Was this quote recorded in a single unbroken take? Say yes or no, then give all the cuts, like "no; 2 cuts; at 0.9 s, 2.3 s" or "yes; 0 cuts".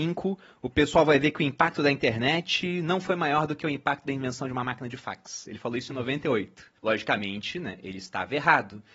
no; 1 cut; at 6.8 s